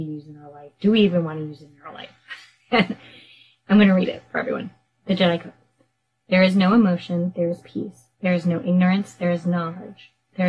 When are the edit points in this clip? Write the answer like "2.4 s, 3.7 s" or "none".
8.1 s